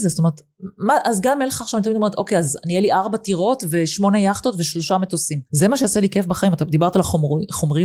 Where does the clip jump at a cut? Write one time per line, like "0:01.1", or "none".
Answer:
0:05.5